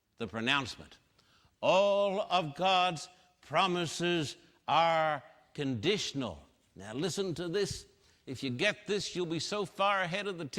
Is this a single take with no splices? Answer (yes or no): yes